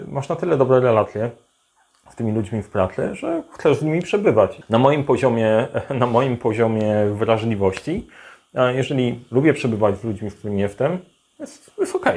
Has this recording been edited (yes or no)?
no